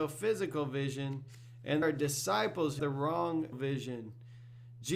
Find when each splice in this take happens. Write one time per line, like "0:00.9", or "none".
0:01.8
0:02.8
0:03.5

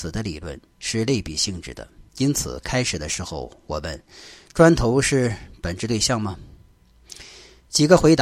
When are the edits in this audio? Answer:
0:02.1

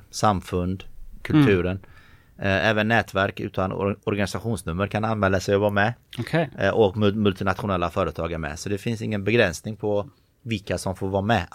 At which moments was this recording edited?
none

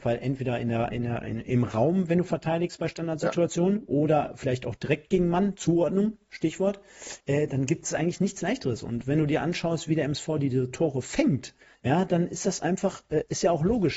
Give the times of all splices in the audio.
0:07.2
0:11.7

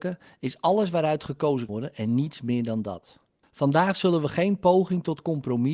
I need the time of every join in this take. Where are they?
0:01.7

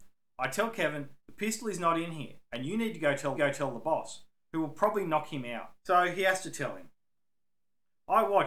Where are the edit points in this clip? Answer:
0:02.4
0:03.4
0:05.8

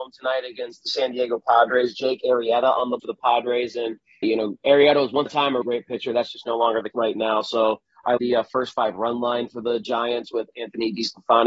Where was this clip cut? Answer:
0:03.0
0:04.2
0:05.3
0:05.6
0:06.9
0:08.2

